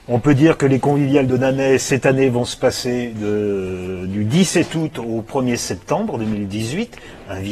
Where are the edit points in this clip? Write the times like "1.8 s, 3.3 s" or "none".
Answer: none